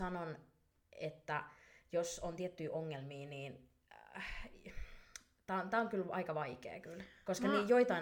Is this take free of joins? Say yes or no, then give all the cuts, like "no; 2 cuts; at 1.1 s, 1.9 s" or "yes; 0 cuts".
yes; 0 cuts